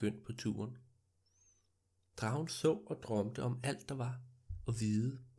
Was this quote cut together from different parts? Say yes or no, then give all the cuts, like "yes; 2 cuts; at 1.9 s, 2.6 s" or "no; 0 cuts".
no; 0 cuts